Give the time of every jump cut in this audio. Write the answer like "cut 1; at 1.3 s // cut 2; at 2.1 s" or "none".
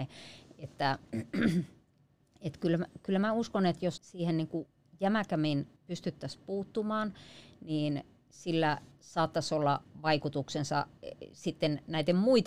cut 1; at 4.0 s // cut 2; at 5.8 s